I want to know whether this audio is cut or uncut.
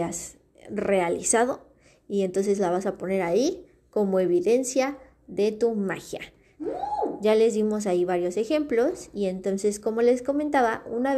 uncut